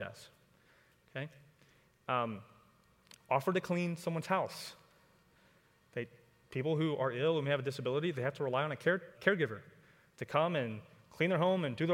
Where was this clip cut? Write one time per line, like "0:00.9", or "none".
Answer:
0:03.2
0:09.1